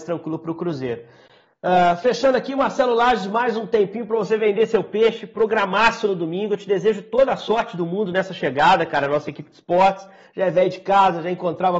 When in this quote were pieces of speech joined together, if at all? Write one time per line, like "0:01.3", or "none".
none